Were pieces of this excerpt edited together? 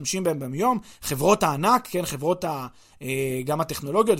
no; 0 cuts

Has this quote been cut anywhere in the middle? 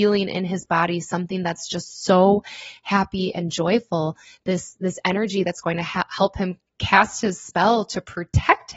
no; 0 cuts

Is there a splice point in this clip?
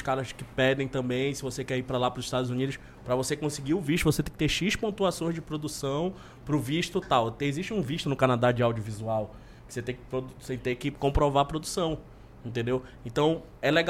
no; 0 cuts

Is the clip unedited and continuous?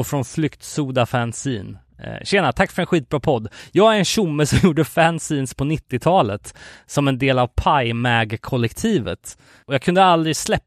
yes; 0 cuts

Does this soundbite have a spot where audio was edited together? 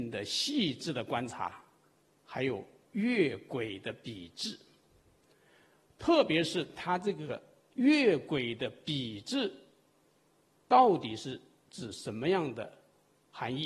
no; 0 cuts

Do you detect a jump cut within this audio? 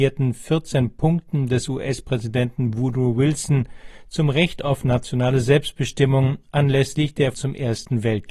yes; 1 cut; at 7.3 s

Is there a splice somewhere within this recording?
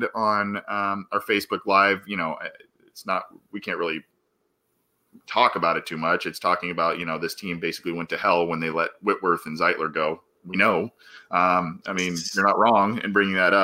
no; 0 cuts

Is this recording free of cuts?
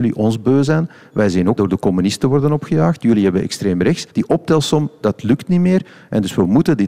no; 2 cuts; at 1.6 s, 4.1 s

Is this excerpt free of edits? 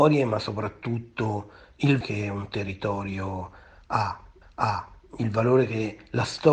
no; 2 cuts; at 2.0 s, 4.4 s

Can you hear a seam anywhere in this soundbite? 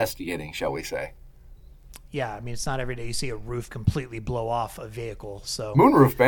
no; 0 cuts

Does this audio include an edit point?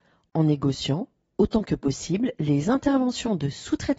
no; 0 cuts

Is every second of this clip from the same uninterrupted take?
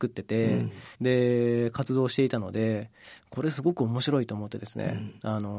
no; 1 cut; at 0.9 s

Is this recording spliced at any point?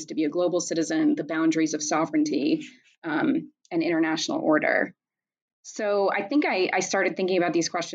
no; 0 cuts

